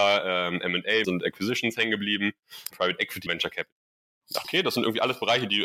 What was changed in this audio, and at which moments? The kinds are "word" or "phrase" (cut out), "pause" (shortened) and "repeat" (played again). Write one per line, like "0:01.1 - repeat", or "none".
0:01.0 - word
0:02.7 - word
0:03.3 - word
0:04.4 - word